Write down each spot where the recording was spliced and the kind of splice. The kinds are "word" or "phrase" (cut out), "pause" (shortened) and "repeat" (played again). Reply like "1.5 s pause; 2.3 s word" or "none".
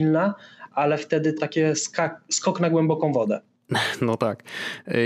1.4 s word